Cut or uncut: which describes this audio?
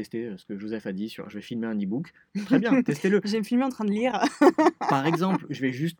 uncut